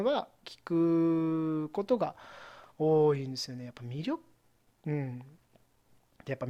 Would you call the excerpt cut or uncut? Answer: uncut